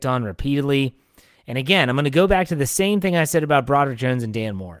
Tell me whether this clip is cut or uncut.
uncut